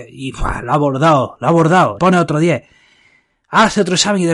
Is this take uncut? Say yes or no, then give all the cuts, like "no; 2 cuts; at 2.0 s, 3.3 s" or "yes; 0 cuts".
no; 1 cut; at 2.0 s